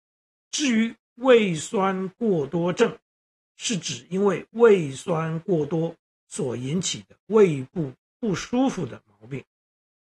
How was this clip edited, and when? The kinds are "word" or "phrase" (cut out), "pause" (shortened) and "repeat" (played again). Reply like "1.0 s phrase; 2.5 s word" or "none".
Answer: none